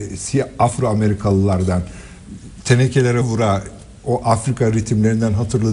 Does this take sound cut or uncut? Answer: cut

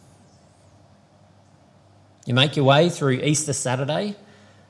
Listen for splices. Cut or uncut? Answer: uncut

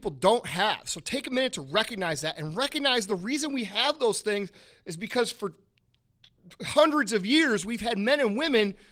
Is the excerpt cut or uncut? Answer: uncut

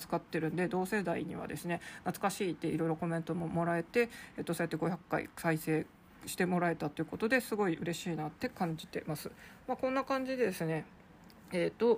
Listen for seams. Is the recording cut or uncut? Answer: uncut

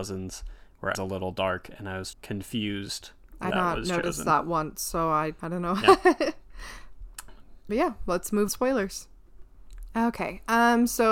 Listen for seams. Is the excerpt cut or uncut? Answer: cut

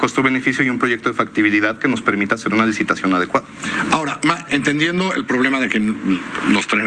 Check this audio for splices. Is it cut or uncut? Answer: cut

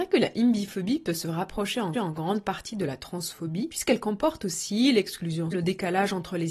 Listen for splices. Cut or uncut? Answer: cut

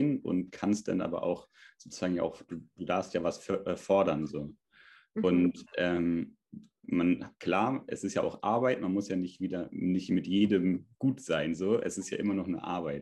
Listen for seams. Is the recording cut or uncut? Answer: uncut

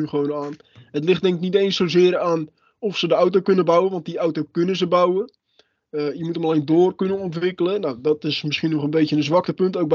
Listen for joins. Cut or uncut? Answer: uncut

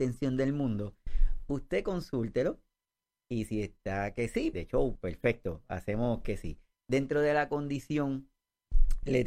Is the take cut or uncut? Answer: cut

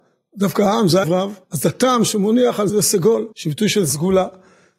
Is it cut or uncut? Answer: cut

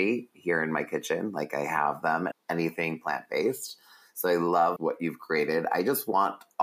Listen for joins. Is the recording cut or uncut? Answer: cut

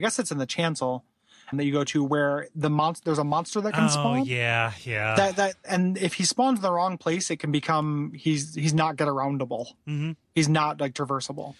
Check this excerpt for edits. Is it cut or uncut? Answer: cut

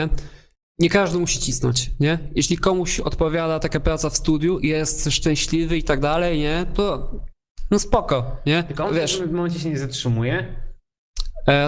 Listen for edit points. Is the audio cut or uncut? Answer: uncut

